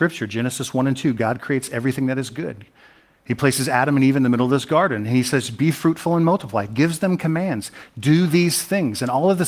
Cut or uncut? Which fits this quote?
uncut